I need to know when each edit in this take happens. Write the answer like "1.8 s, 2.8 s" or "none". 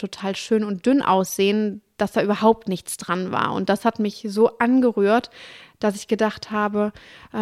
none